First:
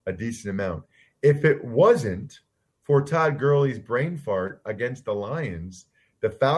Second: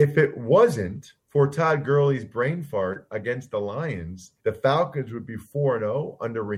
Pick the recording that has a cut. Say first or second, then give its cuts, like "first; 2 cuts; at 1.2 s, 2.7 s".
second; 2 cuts; at 1.2 s, 4.4 s